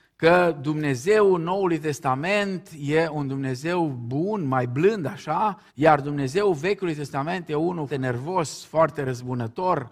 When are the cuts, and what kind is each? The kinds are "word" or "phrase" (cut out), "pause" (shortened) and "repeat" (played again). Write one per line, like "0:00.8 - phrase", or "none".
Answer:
0:05.7 - pause
0:07.9 - word